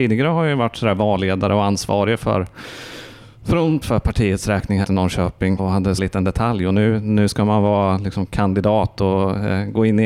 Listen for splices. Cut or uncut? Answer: cut